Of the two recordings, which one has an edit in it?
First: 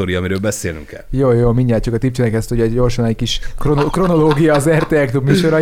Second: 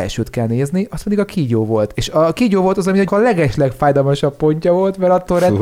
second; 1 cut; at 3.1 s

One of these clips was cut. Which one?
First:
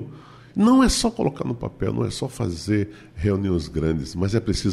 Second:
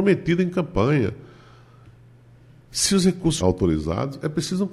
second; 1 cut; at 3.4 s

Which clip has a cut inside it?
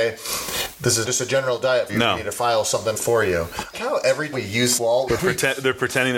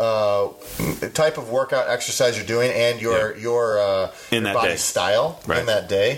first; 7 cuts; at 1.0 s, 1.9 s, 2.9 s, 3.7 s, 4.3 s, 4.8 s, 5.1 s

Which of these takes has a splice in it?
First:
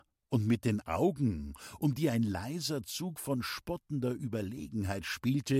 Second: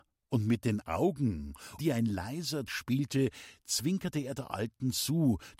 second; 2 cuts; at 1.8 s, 2.7 s

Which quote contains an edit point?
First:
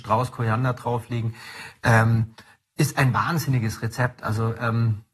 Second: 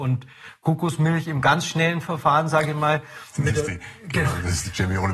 second; 1 cut; at 3.3 s

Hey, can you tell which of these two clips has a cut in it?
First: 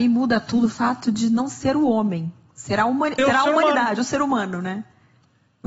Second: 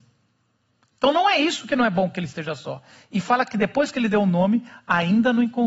first; 1 cut; at 3.2 s

